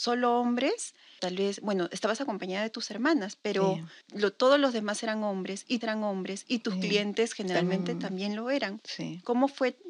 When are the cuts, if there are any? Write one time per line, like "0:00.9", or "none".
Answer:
0:01.2
0:04.0
0:05.8